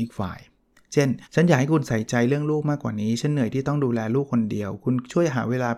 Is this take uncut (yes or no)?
no